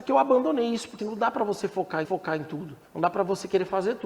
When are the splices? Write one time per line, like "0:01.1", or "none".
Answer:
0:01.0
0:02.0
0:02.8